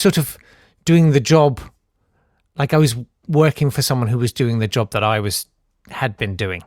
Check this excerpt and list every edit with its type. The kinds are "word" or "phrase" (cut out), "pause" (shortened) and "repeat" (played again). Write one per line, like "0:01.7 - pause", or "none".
none